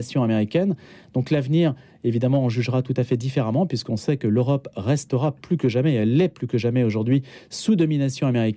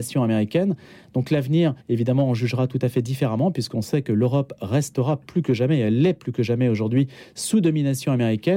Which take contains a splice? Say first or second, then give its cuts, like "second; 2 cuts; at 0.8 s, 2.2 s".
second; 1 cut; at 1.8 s